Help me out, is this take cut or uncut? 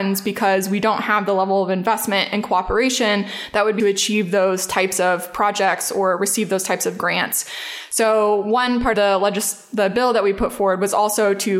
cut